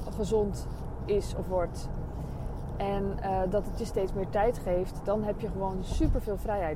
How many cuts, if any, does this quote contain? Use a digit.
0